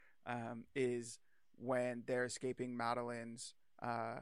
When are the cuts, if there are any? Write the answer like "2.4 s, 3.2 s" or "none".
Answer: none